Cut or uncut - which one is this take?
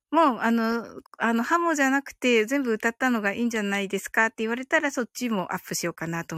cut